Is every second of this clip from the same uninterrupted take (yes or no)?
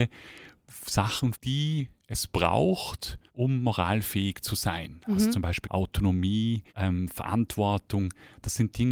no